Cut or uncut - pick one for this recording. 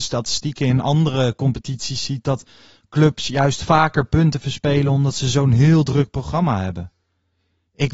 uncut